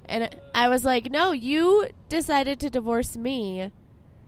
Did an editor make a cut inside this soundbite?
no; 0 cuts

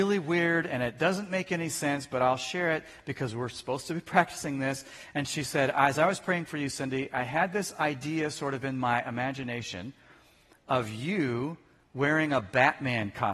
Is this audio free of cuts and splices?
yes; 0 cuts

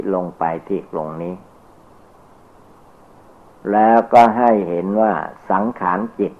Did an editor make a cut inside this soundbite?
no; 0 cuts

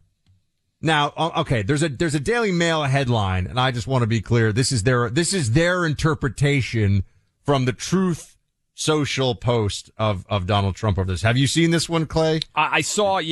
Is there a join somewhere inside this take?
no; 0 cuts

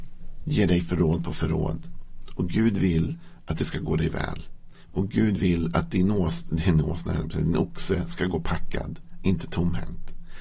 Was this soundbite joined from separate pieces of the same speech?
no; 0 cuts

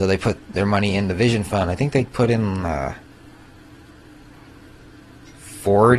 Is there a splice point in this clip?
no; 0 cuts

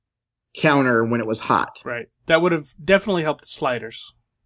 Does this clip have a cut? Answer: yes; 1 cut; at 2.2 s

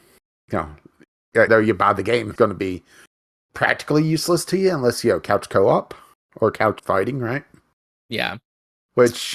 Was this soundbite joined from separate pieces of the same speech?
yes; 3 cuts; at 1.5 s, 2.4 s, 6.8 s

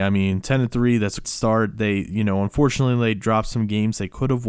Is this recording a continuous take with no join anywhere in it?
no; 1 cut; at 1.2 s

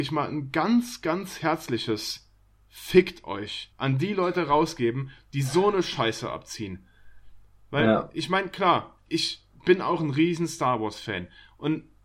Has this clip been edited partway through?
yes; 1 cut; at 3.7 s

